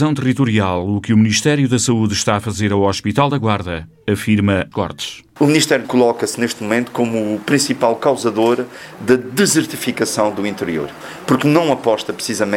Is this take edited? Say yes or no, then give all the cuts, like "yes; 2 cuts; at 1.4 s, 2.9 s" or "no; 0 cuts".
yes; 2 cuts; at 4.7 s, 5.8 s